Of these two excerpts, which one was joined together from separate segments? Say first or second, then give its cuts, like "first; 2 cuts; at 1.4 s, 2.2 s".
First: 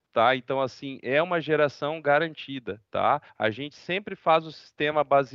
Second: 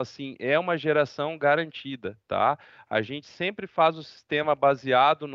first; 1 cut; at 3.3 s